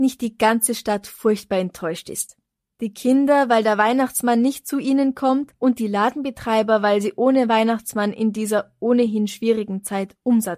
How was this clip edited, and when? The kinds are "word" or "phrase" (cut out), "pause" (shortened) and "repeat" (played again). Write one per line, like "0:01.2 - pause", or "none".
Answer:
none